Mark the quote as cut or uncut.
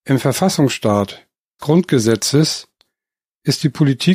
cut